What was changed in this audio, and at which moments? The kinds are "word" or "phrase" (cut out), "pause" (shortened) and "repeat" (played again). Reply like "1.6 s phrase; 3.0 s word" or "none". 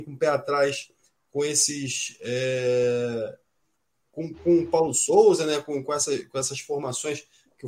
none